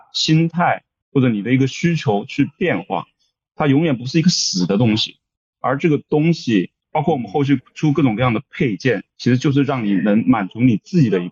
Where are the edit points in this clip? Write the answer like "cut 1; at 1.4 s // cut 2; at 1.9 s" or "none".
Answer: cut 1; at 6.8 s // cut 2; at 9.1 s